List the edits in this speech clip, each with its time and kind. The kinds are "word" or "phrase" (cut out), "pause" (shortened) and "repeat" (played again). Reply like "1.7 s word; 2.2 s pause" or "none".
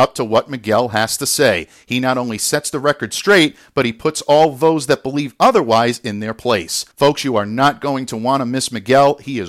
6.9 s pause